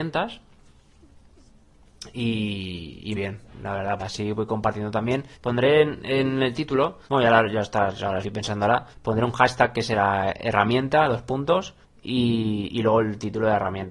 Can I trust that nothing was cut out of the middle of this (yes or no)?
no